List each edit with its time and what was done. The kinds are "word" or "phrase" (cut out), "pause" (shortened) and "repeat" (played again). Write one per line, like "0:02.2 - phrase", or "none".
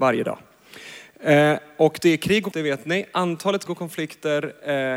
0:02.5 - word
0:03.7 - word